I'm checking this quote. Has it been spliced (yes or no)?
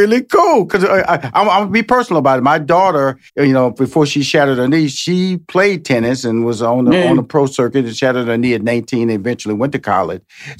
yes